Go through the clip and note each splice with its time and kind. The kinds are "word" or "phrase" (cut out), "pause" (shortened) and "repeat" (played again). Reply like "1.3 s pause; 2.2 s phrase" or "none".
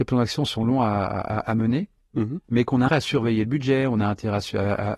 2.9 s word